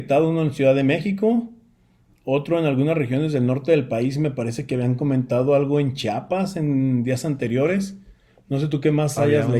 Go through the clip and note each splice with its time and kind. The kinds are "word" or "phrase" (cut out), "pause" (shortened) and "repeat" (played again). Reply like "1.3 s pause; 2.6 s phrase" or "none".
none